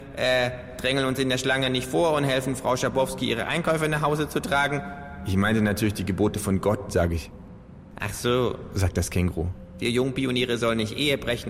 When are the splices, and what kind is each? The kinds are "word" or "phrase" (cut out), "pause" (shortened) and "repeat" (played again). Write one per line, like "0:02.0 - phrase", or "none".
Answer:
none